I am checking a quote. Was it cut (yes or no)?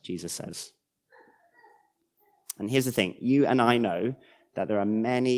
no